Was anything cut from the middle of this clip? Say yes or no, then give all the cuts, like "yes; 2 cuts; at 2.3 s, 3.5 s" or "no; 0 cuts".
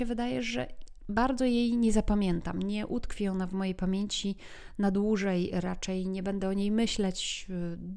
no; 0 cuts